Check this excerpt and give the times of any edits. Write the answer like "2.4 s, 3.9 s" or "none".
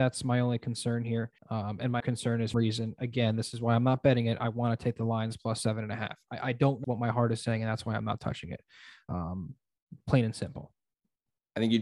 1.4 s, 2.0 s, 2.5 s, 6.8 s